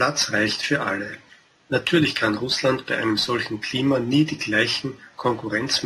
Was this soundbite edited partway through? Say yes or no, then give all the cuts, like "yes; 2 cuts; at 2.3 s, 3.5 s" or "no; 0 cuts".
yes; 1 cut; at 1.5 s